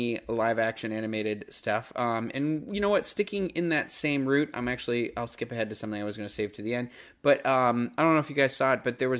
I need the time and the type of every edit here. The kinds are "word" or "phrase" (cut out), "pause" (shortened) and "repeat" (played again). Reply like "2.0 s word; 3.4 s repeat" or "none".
none